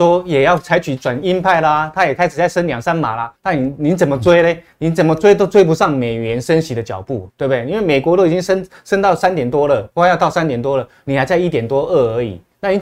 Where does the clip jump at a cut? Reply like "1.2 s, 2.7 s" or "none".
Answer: 3.4 s, 7.3 s